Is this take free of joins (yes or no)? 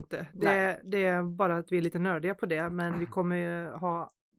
yes